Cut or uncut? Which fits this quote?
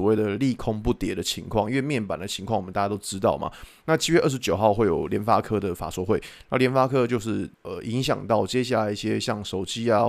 cut